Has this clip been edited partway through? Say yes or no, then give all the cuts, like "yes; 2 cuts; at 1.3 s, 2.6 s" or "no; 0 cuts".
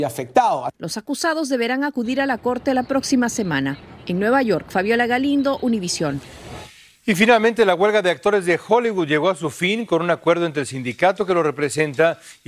no; 0 cuts